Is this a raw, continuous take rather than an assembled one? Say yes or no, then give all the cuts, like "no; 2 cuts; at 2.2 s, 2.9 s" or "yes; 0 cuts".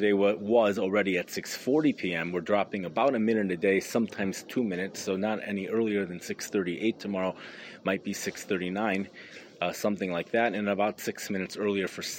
yes; 0 cuts